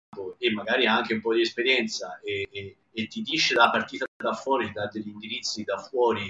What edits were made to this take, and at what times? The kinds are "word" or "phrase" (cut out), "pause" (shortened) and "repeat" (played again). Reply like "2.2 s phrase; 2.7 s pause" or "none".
2.8 s pause